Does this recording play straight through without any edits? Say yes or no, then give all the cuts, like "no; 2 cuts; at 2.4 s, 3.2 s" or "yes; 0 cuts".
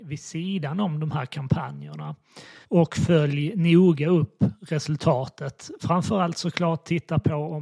no; 1 cut; at 2.6 s